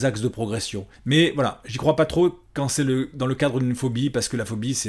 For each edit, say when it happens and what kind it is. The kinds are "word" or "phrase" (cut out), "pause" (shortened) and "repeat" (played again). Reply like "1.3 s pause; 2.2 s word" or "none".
1.0 s pause